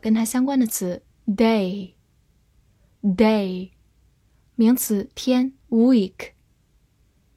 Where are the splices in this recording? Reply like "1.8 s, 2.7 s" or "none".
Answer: 1.1 s, 5.6 s